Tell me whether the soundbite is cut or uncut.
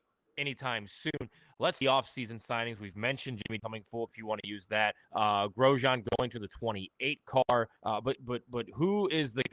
cut